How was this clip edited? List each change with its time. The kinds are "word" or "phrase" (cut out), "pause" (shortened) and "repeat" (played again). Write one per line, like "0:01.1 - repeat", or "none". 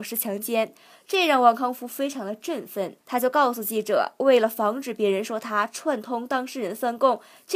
0:03.0 - pause

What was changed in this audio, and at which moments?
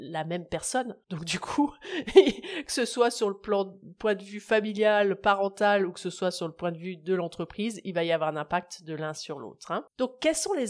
0:01.0 - pause

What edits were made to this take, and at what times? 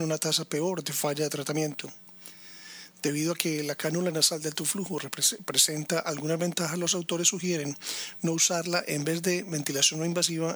none

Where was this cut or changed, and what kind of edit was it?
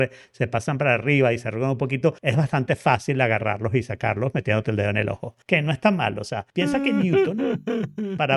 0:02.2 - pause
0:05.4 - pause
0:06.5 - pause

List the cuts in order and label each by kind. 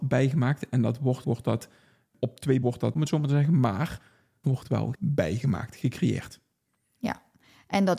0:01.2 - word
0:02.6 - word
0:02.9 - word
0:04.4 - word
0:04.9 - word

